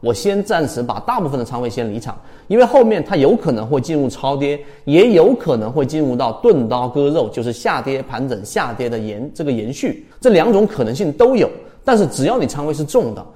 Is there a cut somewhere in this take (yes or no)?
yes